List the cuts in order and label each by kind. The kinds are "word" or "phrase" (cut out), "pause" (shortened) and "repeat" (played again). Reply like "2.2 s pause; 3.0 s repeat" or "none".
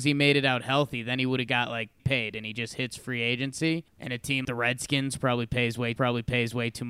2.0 s word; 3.9 s pause; 4.4 s word; 6.0 s repeat